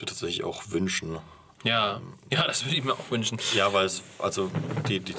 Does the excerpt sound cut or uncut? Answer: uncut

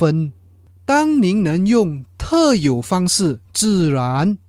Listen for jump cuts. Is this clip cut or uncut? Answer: cut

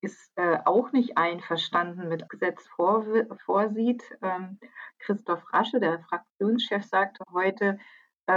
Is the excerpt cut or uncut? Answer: cut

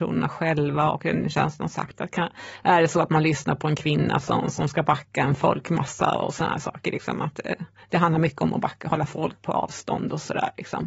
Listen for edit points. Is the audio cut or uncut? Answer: uncut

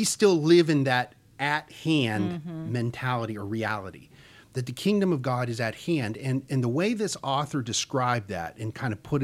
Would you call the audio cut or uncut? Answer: uncut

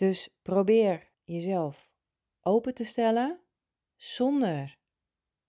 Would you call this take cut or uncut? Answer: cut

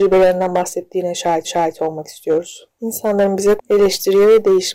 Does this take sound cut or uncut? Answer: cut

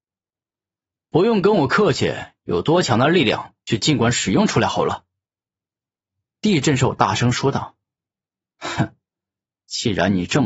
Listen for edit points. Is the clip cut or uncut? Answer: uncut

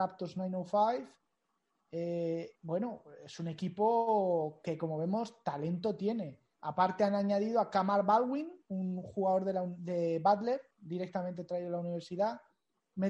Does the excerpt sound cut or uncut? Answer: cut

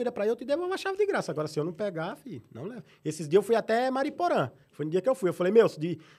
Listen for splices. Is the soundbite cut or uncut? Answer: uncut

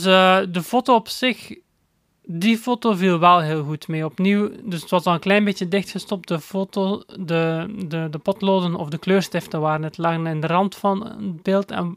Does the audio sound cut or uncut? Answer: uncut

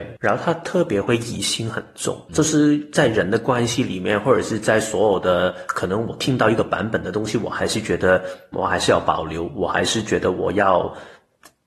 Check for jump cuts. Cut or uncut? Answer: cut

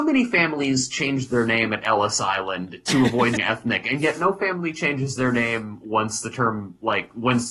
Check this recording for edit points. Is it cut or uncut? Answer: cut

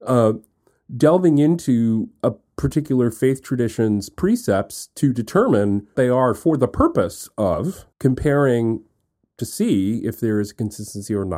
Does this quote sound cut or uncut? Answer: cut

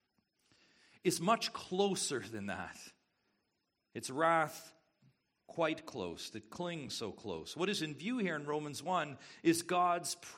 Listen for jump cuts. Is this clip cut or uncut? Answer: uncut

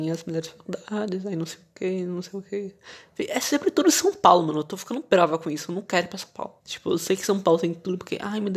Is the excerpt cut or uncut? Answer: cut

